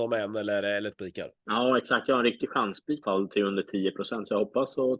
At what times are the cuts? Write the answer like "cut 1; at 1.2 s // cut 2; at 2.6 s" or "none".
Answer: cut 1; at 0.9 s // cut 2; at 1.4 s // cut 3; at 3.0 s